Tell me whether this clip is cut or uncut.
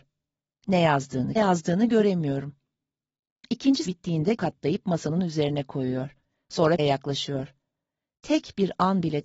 cut